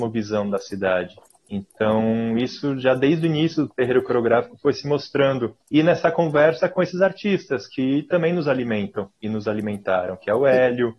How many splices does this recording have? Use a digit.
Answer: 2